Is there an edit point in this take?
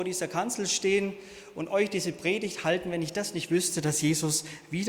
no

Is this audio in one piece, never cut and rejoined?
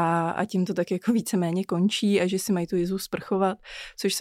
yes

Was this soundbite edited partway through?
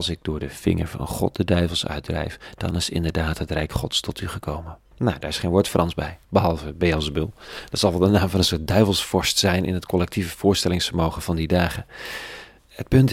yes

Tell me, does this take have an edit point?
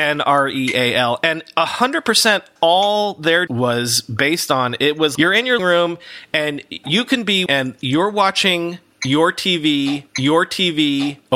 yes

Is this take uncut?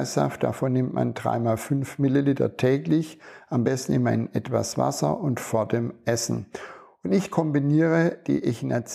yes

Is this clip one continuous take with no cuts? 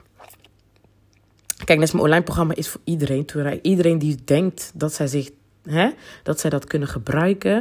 yes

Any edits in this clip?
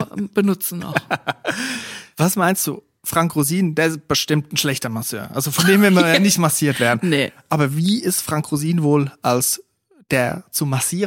no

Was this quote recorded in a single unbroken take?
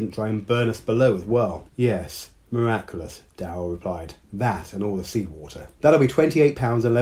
no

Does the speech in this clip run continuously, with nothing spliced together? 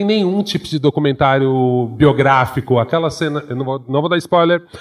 yes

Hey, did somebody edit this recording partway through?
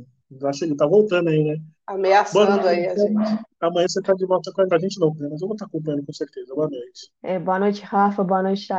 yes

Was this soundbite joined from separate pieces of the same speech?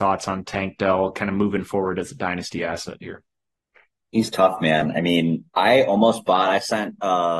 no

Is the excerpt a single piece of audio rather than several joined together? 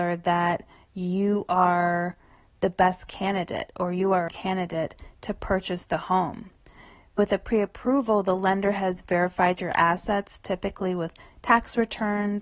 no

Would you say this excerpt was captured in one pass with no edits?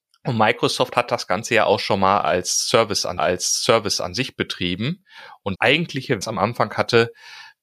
no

